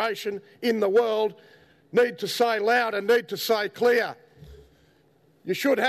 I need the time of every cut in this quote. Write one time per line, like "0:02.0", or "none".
none